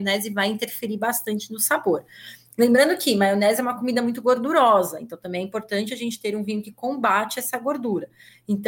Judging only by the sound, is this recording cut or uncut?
uncut